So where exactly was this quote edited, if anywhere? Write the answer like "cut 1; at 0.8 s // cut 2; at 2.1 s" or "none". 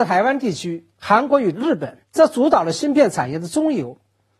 cut 1; at 2.0 s